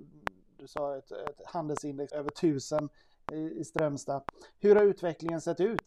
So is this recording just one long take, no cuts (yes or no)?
no